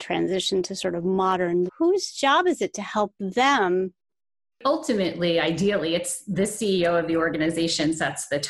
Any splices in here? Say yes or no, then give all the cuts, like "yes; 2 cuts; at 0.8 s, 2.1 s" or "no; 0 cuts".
yes; 1 cut; at 1.7 s